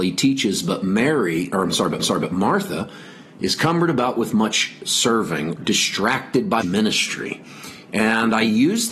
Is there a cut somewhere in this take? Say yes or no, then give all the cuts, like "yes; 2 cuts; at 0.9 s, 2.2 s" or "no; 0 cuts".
yes; 3 cuts; at 2.0 s, 5.6 s, 6.6 s